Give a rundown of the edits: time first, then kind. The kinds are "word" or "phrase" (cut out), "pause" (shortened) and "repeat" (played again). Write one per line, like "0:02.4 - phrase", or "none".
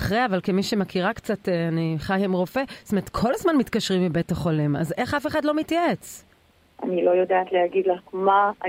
0:06.4 - pause